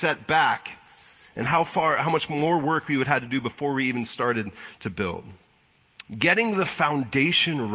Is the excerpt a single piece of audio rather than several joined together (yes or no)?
no